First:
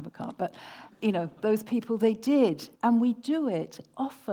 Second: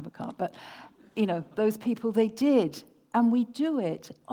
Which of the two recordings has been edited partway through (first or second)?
first